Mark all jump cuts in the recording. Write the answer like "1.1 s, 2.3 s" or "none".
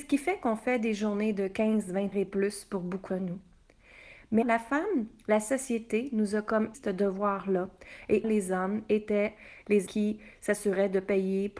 2.1 s, 3.1 s, 4.4 s, 6.7 s, 8.2 s, 9.9 s

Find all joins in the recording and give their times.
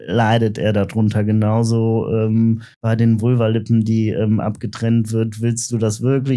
2.7 s

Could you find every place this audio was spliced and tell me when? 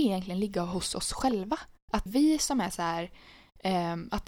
2.1 s

